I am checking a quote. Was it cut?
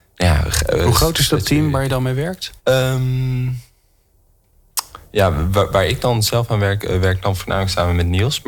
yes; 1 cut; at 2.6 s

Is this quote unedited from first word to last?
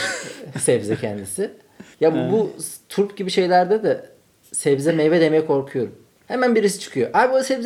no; 1 cut; at 1.9 s

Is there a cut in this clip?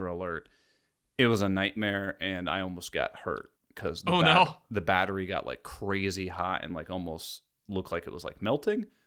yes; 1 cut; at 3.6 s

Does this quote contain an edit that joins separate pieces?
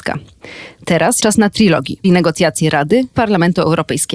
yes; 3 cuts; at 1.2 s, 2.0 s, 3.1 s

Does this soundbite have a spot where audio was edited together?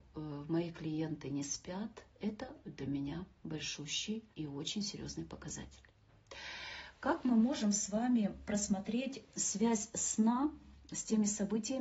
yes; 1 cut; at 4.3 s

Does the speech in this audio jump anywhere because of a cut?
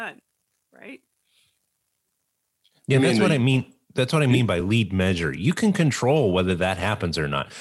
no; 0 cuts

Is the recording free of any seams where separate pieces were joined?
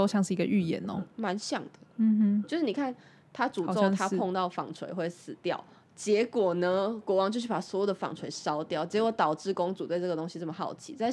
no; 1 cut; at 1.1 s

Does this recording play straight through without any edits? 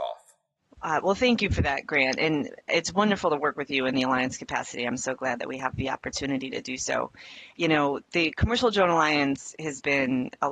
no; 1 cut; at 7.5 s

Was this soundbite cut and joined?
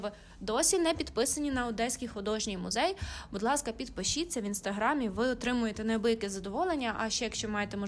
no; 0 cuts

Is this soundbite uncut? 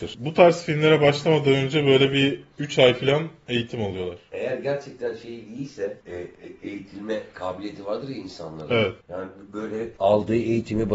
no; 3 cuts; at 6.0 s, 9.0 s, 10.0 s

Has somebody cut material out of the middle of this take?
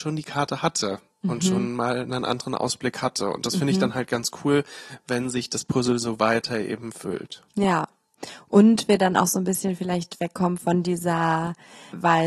no; 0 cuts

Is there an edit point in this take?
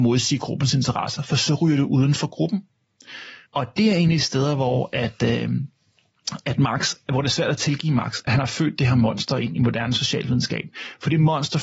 yes; 1 cut; at 3.4 s

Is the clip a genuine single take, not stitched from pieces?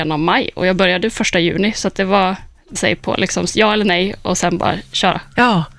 no; 2 cuts; at 2.8 s, 3.5 s

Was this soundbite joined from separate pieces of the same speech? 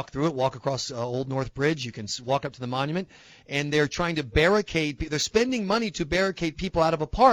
no; 0 cuts

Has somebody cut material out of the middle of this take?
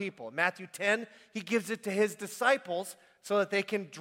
no; 0 cuts

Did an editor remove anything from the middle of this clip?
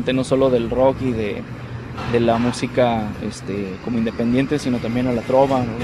no; 0 cuts

